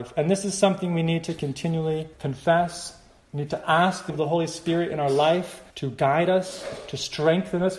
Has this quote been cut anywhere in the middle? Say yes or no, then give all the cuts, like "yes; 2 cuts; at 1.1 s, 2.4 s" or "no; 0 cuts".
yes; 3 cuts; at 2.1 s, 4.1 s, 5.7 s